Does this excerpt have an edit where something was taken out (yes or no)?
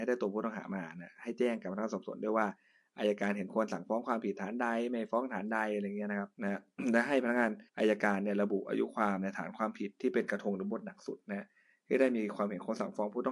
yes